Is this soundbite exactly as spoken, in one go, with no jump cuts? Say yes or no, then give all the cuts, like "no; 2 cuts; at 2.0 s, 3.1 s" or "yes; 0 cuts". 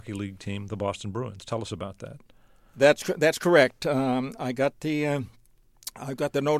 yes; 0 cuts